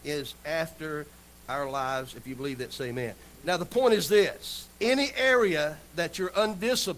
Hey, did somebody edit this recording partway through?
no; 0 cuts

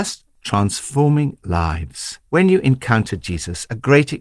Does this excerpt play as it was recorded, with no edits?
no; 1 cut; at 2.3 s

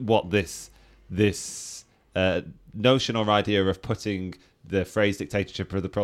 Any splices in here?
no; 0 cuts

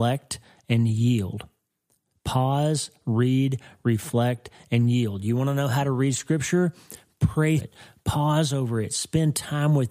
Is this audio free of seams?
no; 1 cut; at 7.6 s

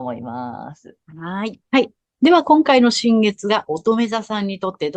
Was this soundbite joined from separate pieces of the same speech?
yes; 2 cuts; at 1.0 s, 1.6 s

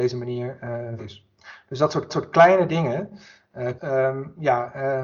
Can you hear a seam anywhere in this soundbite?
yes; 3 cuts; at 1.0 s, 2.1 s, 3.8 s

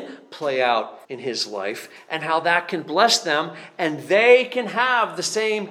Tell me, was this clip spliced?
yes; 1 cut; at 1.0 s

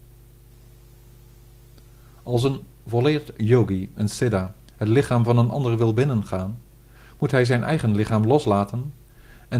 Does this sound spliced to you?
no; 0 cuts

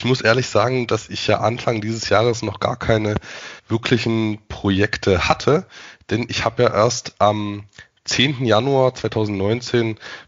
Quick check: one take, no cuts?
no; 1 cut; at 3.6 s

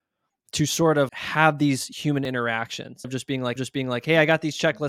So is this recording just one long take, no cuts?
no; 3 cuts; at 1.1 s, 3.0 s, 3.6 s

